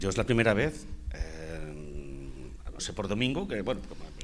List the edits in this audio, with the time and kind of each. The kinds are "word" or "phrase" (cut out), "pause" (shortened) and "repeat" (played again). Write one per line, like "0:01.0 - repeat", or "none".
0:02.8 - phrase